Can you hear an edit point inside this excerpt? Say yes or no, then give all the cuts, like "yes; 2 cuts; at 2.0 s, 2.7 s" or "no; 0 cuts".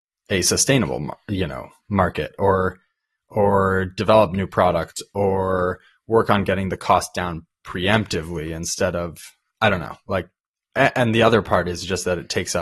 no; 0 cuts